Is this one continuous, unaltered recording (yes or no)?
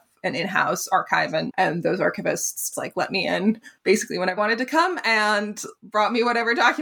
no